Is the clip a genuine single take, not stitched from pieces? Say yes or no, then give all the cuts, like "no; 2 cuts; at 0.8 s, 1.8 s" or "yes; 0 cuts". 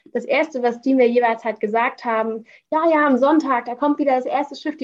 yes; 0 cuts